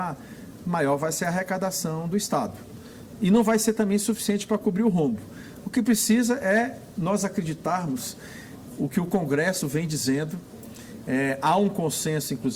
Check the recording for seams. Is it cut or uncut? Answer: uncut